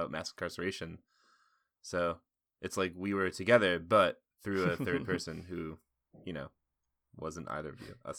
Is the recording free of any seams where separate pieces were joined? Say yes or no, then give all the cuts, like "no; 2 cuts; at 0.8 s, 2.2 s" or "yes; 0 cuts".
yes; 0 cuts